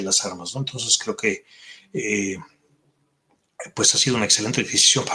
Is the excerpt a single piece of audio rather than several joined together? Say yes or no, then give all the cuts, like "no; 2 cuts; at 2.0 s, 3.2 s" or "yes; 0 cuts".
yes; 0 cuts